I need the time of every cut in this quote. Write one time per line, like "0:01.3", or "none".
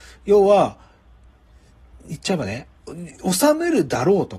0:02.8